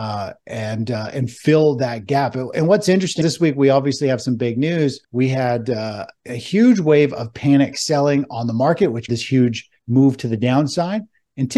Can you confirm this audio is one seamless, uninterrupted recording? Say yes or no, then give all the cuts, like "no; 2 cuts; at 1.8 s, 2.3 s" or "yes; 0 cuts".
no; 4 cuts; at 3.2 s, 5.0 s, 9.1 s, 9.8 s